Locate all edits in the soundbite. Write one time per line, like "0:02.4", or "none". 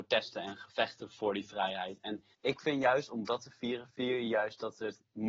0:02.3